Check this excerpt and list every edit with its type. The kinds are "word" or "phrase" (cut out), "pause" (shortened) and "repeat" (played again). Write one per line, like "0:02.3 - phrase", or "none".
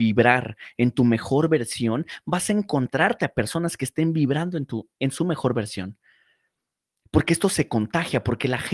0:04.9 - pause